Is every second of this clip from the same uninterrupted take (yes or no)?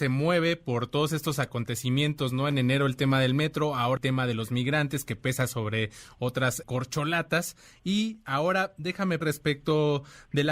no